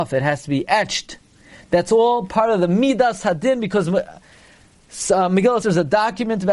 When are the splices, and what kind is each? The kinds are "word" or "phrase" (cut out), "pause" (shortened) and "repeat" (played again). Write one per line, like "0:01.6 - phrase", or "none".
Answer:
0:05.6 - word